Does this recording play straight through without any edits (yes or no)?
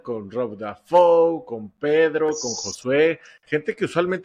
yes